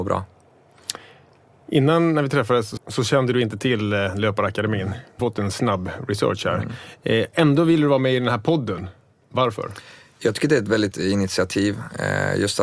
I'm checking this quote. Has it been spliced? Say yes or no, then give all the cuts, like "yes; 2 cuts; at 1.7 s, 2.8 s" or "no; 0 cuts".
yes; 3 cuts; at 2.8 s, 5.2 s, 10.9 s